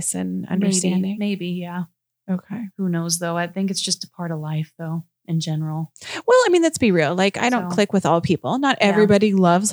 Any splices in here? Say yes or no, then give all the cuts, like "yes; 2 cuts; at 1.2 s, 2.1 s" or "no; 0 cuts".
no; 0 cuts